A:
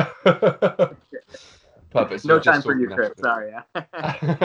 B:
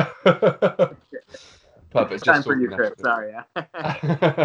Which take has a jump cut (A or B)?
B